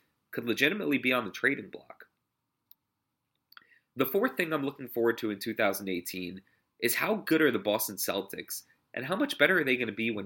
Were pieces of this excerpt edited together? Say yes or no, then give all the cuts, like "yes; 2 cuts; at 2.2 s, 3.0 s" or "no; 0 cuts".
no; 0 cuts